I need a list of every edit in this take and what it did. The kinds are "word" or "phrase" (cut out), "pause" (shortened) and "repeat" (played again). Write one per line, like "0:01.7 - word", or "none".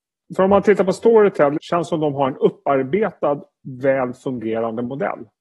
none